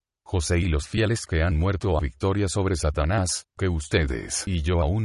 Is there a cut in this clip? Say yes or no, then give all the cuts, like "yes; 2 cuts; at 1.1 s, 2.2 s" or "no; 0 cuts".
yes; 1 cut; at 2.0 s